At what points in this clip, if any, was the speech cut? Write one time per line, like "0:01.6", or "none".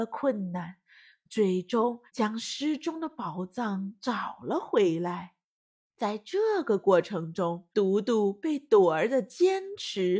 0:02.1
0:07.7